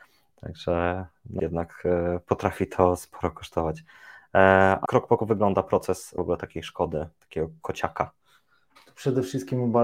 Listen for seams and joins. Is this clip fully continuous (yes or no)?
no